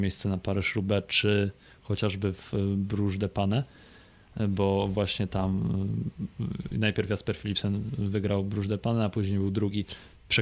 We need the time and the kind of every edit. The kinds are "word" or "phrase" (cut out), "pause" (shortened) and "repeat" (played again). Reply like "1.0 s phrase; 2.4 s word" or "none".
none